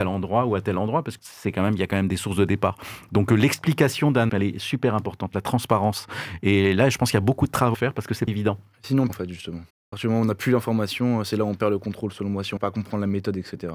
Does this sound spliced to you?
yes; 7 cuts; at 1.2 s, 4.3 s, 7.7 s, 8.3 s, 9.1 s, 9.7 s, 12.6 s

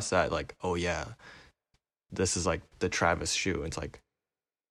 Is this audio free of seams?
yes; 0 cuts

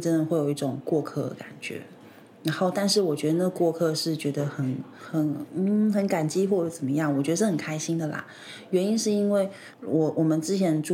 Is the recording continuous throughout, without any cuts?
yes; 0 cuts

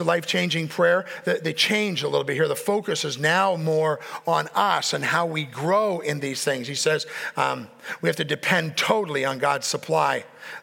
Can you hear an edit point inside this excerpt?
no; 0 cuts

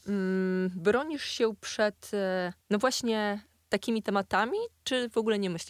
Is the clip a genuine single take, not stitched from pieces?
no; 1 cut; at 2.6 s

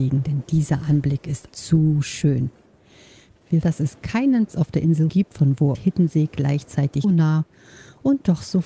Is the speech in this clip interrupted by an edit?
yes; 6 cuts; at 1.5 s, 3.6 s, 4.5 s, 5.1 s, 5.7 s, 7.0 s

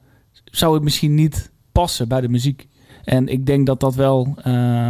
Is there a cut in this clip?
no; 0 cuts

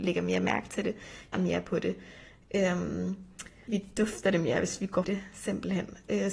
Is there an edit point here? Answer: yes; 3 cuts; at 1.3 s, 3.7 s, 5.0 s

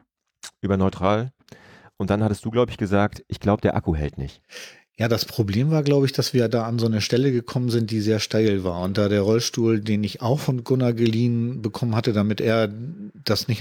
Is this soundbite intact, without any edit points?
yes; 0 cuts

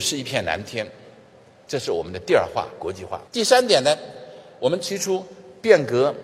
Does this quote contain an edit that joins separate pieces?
yes; 1 cut; at 3.3 s

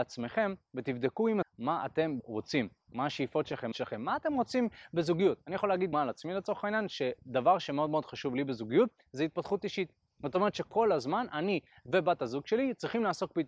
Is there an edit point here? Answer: yes; 4 cuts; at 1.4 s, 2.2 s, 3.7 s, 5.9 s

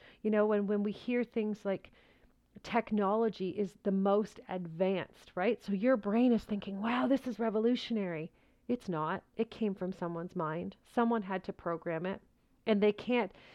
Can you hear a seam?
no; 0 cuts

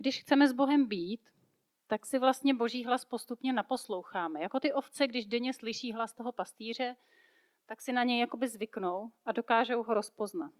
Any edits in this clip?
no; 0 cuts

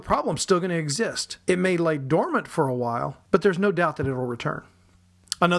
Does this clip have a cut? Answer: yes; 2 cuts; at 1.4 s, 3.2 s

